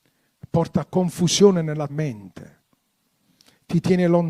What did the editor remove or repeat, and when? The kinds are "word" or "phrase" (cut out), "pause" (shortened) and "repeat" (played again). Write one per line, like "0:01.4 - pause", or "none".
0:01.9 - word